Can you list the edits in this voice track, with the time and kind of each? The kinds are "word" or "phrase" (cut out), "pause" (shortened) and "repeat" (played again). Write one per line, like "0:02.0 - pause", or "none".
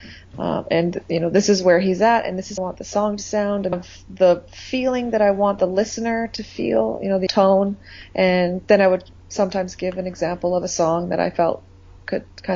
0:02.6 - phrase
0:03.7 - phrase
0:07.3 - phrase